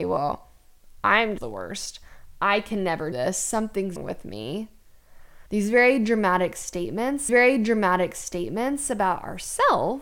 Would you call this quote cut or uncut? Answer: cut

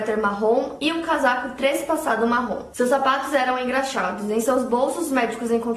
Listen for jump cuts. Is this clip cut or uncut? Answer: uncut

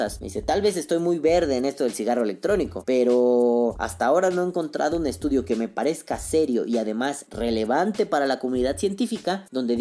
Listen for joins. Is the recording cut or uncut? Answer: uncut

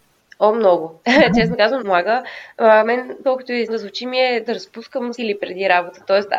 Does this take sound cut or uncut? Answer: cut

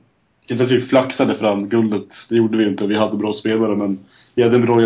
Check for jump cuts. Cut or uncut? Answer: uncut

